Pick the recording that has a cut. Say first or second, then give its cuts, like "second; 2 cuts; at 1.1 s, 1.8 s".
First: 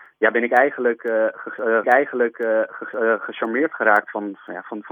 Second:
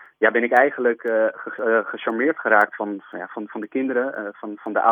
first; 1 cut; at 1.8 s